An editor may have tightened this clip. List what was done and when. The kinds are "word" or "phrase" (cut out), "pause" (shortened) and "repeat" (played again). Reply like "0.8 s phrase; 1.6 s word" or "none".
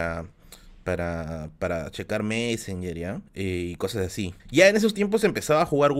3.3 s pause; 4.4 s pause